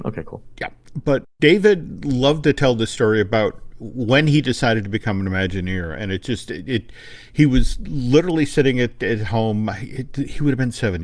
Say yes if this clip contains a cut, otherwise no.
no